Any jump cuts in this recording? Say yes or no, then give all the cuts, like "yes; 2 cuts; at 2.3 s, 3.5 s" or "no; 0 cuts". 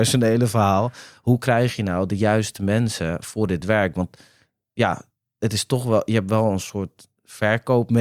no; 0 cuts